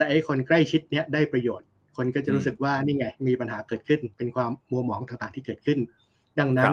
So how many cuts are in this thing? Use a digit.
3